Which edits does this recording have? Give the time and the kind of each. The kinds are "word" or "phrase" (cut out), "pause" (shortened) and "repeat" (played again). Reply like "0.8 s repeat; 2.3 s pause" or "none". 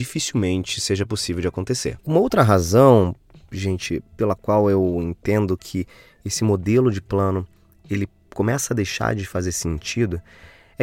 none